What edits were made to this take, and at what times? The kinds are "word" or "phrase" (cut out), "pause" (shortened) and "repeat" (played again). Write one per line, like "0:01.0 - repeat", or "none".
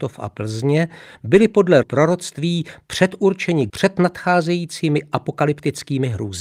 0:01.8 - word
0:03.7 - word